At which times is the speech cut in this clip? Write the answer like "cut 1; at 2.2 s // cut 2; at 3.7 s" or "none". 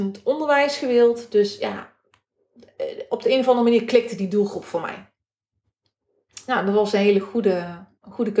none